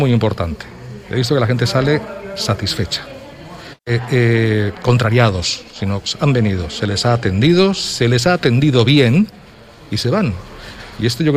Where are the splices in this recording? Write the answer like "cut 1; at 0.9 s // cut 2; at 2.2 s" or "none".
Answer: cut 1; at 3.8 s